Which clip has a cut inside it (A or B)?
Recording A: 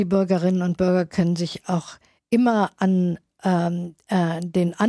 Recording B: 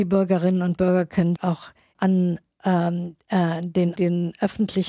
B